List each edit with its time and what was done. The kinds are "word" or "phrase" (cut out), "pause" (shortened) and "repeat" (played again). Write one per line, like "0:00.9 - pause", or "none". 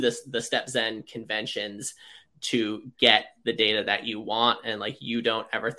none